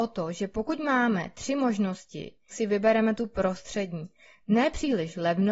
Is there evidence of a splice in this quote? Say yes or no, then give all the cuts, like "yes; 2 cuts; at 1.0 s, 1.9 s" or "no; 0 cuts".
yes; 1 cut; at 2.5 s